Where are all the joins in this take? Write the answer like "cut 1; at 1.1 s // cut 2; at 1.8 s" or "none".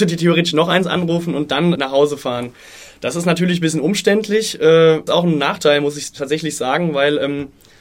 cut 1; at 1.7 s // cut 2; at 5.1 s